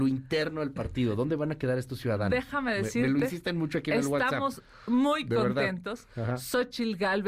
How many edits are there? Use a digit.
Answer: 0